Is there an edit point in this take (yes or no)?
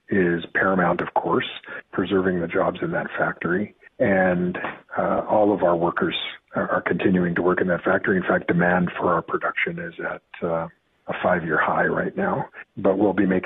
no